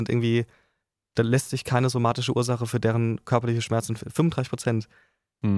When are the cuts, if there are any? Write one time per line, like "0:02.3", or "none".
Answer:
none